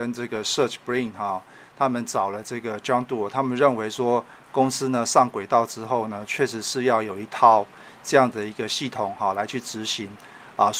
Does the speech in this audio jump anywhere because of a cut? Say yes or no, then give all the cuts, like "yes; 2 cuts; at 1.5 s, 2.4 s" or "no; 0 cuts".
no; 0 cuts